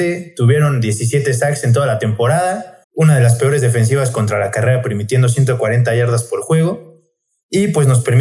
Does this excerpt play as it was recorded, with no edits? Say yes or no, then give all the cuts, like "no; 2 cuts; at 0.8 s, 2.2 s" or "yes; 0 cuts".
no; 1 cut; at 2.8 s